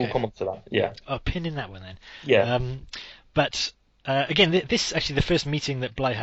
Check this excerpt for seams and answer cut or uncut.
uncut